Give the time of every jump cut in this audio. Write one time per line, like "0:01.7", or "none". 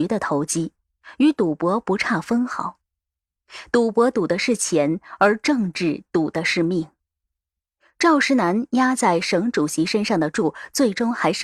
none